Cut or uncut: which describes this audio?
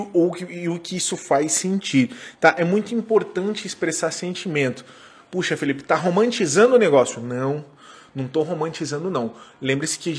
uncut